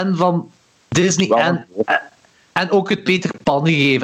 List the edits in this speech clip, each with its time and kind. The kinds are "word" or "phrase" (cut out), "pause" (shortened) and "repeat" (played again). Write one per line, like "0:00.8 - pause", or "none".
none

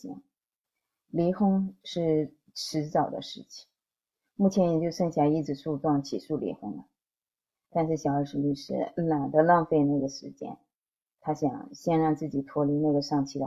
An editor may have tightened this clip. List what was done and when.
none

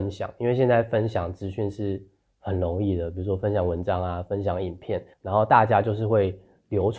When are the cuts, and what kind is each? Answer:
0:05.1 - pause

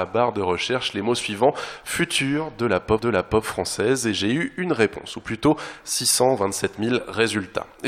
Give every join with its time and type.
0:03.0 - repeat

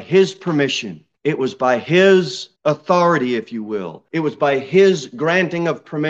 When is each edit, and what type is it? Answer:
0:01.1 - pause
0:02.6 - pause
0:04.1 - pause

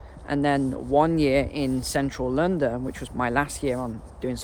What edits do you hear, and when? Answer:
0:03.1 - word

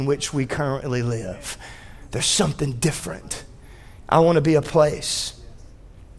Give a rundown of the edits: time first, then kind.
none

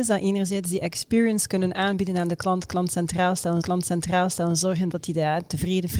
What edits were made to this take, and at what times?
0:03.6 - repeat

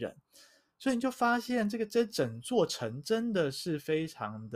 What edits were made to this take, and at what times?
none

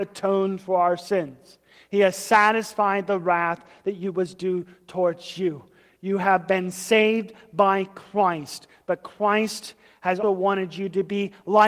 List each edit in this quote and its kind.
0:10.2 - word

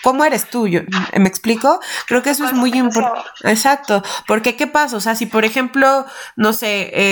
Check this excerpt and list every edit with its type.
none

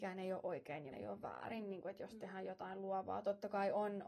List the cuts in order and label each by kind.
0:00.9 - word

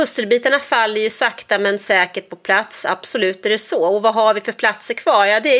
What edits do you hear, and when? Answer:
none

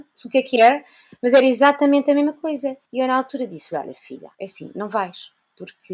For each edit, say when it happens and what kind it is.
0:02.9 - pause
0:04.3 - pause

